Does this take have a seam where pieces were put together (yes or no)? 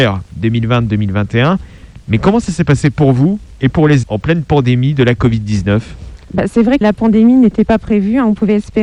yes